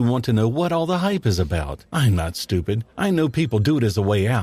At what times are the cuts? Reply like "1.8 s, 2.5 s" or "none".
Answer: 1.9 s, 2.9 s

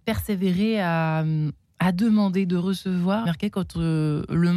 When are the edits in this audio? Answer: 3.3 s

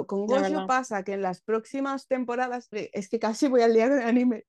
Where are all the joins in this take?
2.7 s

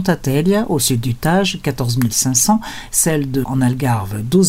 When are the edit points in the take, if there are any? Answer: 3.4 s

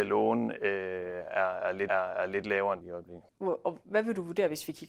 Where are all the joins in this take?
1.9 s, 2.8 s, 3.3 s

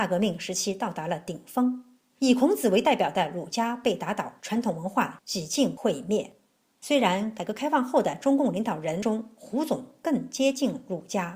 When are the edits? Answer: 4.4 s

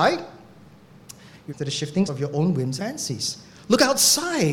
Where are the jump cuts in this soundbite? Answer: 1.5 s, 2.1 s, 2.8 s

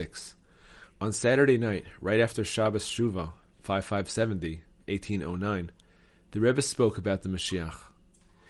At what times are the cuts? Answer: none

